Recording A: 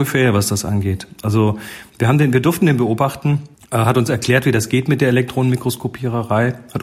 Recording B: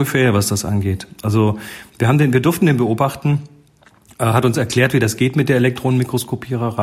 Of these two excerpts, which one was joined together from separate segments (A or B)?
A